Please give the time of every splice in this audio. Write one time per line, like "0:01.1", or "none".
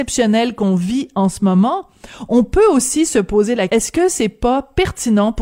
0:03.7

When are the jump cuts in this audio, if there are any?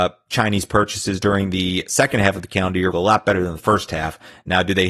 0:02.9

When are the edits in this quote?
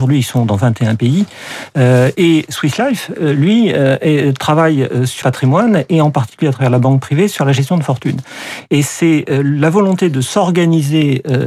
0:05.2

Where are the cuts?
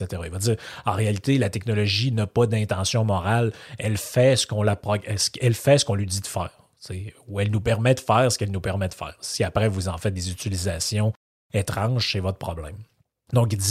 none

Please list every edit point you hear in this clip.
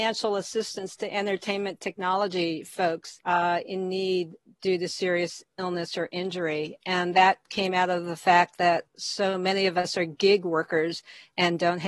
0:03.2
0:04.4
0:08.9

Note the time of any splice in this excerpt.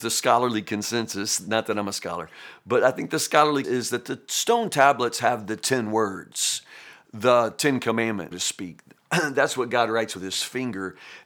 0:03.6
0:08.3

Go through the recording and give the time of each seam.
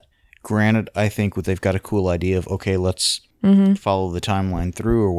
0:01.4

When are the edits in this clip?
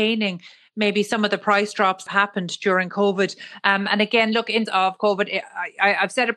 0:02.1
0:04.7

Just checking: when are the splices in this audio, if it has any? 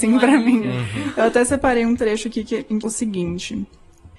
0:02.8

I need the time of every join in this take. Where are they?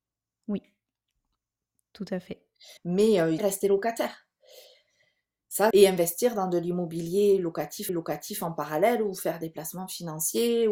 0:02.8
0:03.4
0:05.7
0:07.9

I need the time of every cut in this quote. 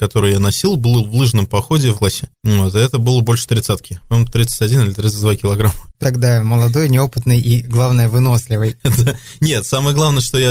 0:01.9
0:06.0

